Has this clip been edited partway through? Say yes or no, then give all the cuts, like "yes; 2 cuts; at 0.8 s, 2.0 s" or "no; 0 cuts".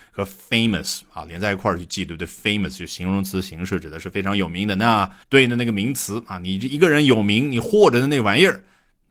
yes; 1 cut; at 5.2 s